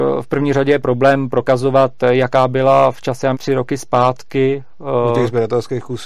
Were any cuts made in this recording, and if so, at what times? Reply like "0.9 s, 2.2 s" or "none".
3.3 s